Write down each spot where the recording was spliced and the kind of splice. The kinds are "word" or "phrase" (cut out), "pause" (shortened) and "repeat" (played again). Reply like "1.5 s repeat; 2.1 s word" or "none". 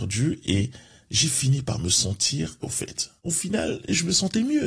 2.6 s word; 3.2 s pause